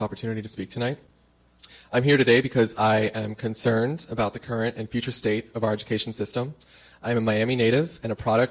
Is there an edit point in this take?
no; 0 cuts

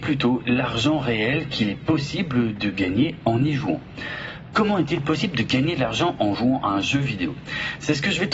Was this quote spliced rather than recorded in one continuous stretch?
no; 0 cuts

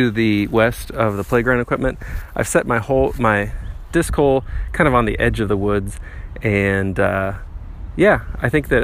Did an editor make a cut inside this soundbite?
no; 0 cuts

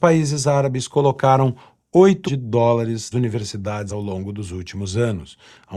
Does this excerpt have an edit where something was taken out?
yes; 3 cuts; at 2.3 s, 3.1 s, 3.9 s

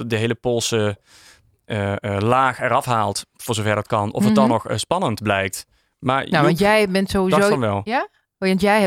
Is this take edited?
no; 0 cuts

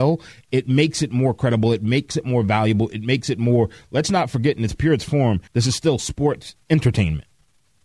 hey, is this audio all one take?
no; 1 cut; at 5.5 s

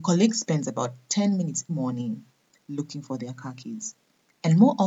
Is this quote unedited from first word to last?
no; 1 cut; at 1.7 s

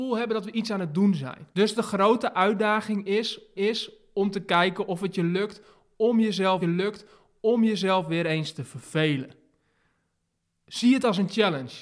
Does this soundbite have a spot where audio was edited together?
yes; 3 cuts; at 1.5 s, 3.6 s, 6.6 s

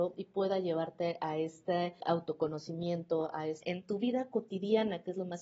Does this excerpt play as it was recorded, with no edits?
no; 2 cuts; at 2.0 s, 3.6 s

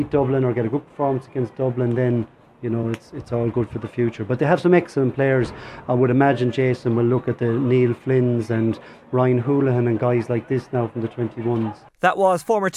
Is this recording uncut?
yes; 0 cuts

